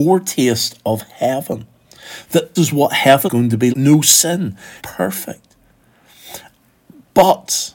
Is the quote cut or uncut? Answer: cut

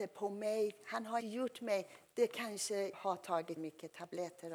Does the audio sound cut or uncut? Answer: cut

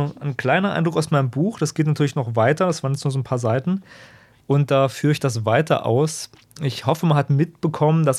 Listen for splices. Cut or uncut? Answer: uncut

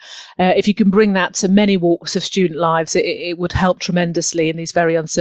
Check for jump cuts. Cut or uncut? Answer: uncut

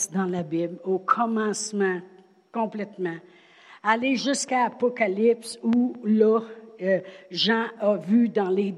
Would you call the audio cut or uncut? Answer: uncut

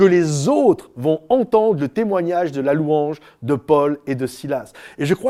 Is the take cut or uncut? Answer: uncut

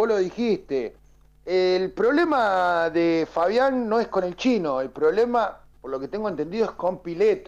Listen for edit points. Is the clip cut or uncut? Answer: cut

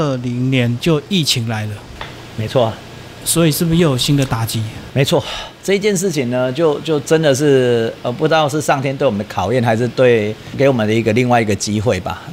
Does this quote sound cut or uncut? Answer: uncut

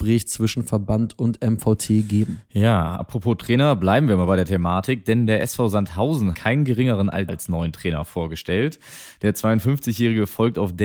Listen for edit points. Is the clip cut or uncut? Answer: cut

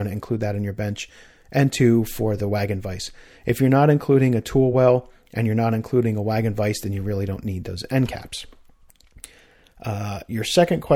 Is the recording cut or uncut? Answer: uncut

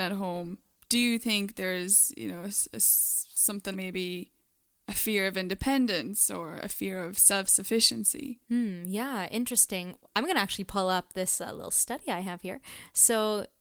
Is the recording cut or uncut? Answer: cut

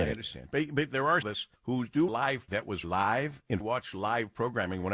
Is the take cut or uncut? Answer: cut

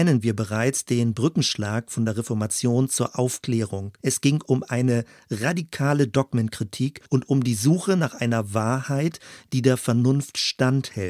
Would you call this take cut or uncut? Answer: cut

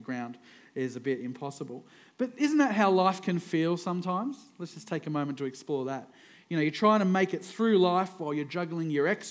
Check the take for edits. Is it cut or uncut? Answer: uncut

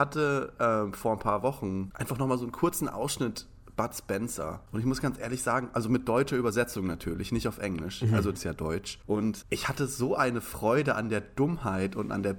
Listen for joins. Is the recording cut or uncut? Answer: cut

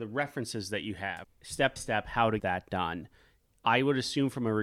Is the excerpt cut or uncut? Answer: cut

